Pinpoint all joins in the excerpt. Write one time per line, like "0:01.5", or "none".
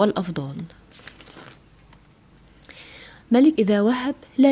0:03.6